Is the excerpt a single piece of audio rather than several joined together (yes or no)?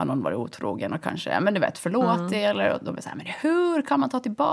yes